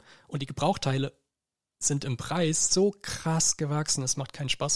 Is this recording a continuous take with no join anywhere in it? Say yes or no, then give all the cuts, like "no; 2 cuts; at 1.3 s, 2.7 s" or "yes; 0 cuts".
yes; 0 cuts